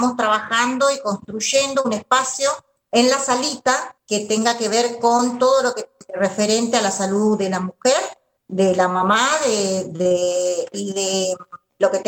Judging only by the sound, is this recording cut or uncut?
cut